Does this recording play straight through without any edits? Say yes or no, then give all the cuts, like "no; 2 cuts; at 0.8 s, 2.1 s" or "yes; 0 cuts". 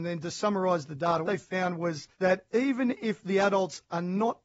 no; 2 cuts; at 1.2 s, 2.1 s